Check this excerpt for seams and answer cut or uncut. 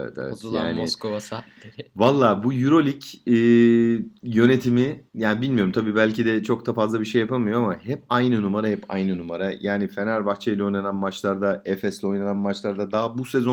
cut